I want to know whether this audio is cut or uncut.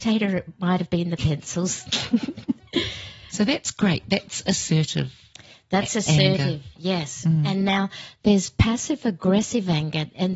uncut